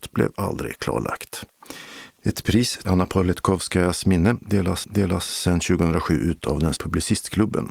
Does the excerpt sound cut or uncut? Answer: cut